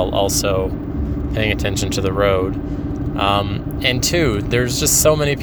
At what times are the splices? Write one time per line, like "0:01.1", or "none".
none